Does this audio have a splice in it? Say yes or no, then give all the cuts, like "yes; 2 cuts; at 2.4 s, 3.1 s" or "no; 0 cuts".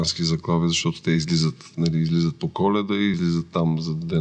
no; 0 cuts